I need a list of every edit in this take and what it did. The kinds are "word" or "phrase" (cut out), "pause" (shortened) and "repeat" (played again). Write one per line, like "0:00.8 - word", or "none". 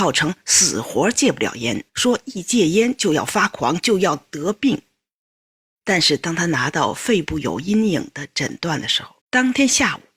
0:01.9 - pause
0:09.2 - pause